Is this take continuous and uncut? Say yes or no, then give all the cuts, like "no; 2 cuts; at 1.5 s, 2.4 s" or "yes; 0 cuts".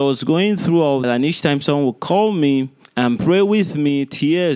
no; 2 cuts; at 1.0 s, 2.8 s